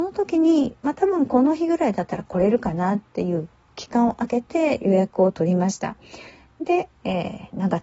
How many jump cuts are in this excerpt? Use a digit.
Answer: 1